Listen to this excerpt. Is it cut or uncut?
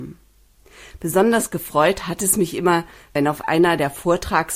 uncut